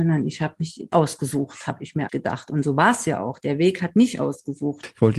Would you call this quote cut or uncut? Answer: cut